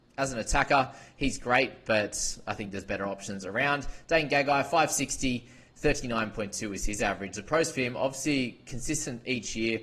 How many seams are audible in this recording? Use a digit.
0